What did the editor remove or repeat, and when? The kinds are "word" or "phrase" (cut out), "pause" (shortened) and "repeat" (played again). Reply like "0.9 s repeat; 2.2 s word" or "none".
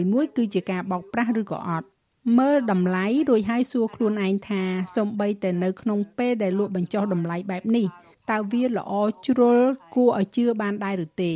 none